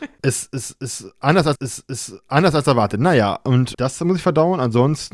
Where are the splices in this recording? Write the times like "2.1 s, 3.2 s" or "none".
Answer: 1.6 s, 3.7 s